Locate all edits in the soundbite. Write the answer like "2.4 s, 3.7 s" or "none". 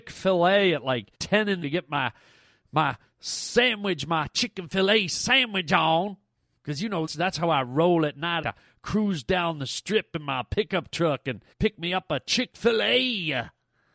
1.1 s, 1.6 s, 7.1 s, 8.4 s, 11.5 s